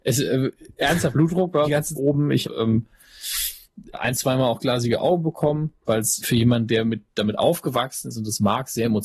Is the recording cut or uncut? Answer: cut